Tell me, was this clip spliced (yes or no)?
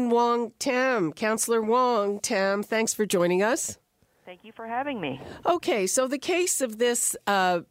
no